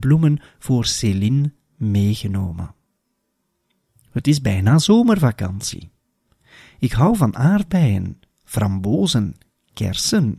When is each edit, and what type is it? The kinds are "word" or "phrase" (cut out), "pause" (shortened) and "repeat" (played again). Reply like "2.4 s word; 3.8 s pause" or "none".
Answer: none